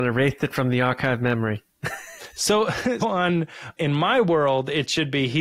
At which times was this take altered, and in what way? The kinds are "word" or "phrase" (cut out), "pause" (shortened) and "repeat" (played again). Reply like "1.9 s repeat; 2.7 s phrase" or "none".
3.0 s word; 3.8 s word